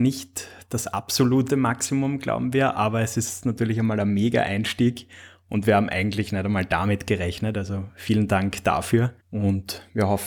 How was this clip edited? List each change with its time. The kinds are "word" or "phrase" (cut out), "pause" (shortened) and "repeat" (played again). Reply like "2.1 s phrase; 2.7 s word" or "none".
9.2 s pause